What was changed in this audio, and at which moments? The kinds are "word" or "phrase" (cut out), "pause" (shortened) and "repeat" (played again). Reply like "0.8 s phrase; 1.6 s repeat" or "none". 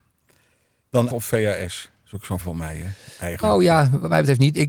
1.1 s word; 2.4 s word; 3.4 s word